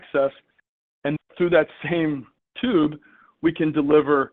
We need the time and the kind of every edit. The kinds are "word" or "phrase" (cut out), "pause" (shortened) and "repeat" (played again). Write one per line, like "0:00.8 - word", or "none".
0:01.2 - word
0:02.4 - pause